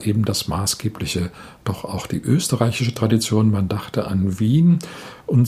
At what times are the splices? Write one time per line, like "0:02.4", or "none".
none

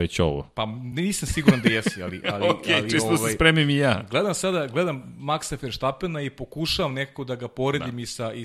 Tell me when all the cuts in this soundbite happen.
none

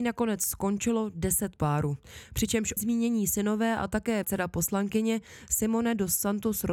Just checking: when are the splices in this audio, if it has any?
0:01.6
0:02.8
0:04.2

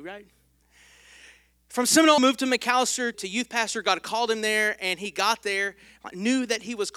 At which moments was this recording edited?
0:02.2
0:03.1

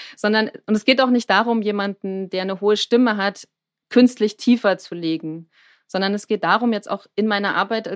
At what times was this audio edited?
none

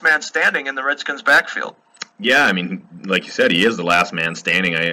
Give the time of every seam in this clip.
0:02.1

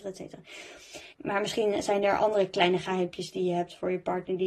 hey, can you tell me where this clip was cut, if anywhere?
0:01.1

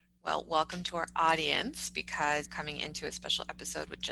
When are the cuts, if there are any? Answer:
0:02.5

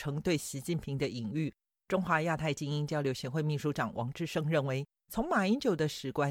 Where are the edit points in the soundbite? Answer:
none

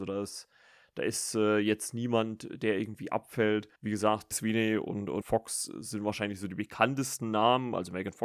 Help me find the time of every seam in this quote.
0:03.8
0:04.3
0:05.2

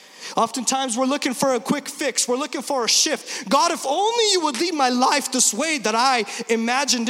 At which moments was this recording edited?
none

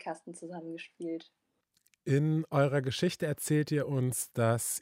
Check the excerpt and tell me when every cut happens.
none

